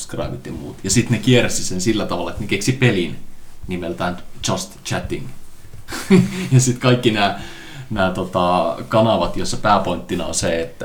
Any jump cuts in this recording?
no; 0 cuts

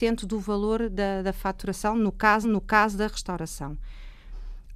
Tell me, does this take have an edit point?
yes; 1 cut; at 2.4 s

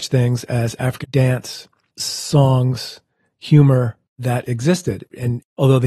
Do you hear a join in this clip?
yes; 1 cut; at 1.0 s

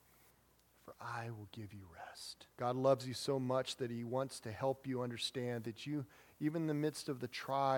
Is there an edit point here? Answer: yes; 1 cut; at 2.5 s

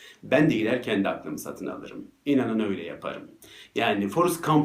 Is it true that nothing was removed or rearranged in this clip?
yes; 0 cuts

